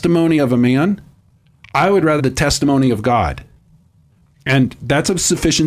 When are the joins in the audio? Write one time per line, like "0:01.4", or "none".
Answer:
0:02.2